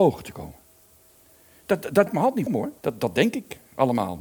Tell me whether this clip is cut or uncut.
cut